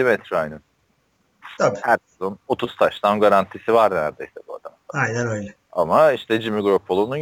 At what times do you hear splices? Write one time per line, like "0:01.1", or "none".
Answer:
0:05.6